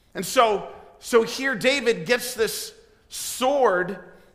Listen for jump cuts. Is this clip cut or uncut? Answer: uncut